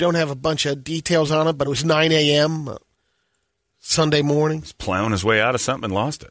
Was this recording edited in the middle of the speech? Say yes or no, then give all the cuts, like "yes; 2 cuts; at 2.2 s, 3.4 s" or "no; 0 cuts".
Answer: no; 0 cuts